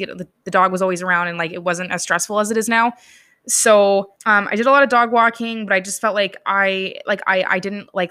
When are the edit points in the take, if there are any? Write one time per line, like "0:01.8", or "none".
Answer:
0:04.2